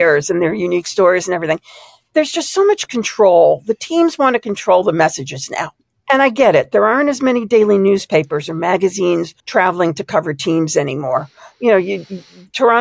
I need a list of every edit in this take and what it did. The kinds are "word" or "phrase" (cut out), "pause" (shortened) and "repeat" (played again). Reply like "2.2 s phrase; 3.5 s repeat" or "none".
5.8 s pause; 9.4 s pause